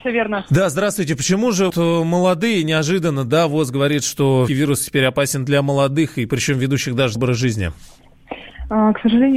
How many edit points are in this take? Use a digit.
3